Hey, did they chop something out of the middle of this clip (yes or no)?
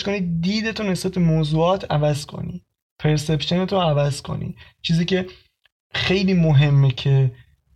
no